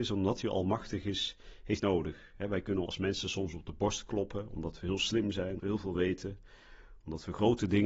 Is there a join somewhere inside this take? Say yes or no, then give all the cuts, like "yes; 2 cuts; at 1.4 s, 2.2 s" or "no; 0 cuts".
yes; 3 cuts; at 1.8 s, 2.9 s, 5.6 s